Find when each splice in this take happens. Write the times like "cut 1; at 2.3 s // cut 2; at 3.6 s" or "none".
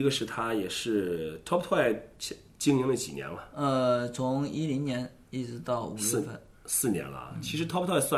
none